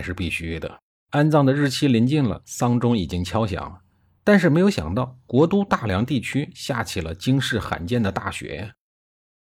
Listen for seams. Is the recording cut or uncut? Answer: cut